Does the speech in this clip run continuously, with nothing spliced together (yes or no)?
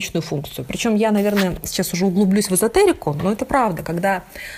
yes